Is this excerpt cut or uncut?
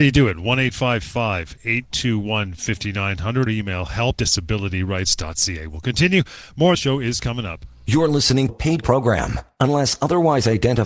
cut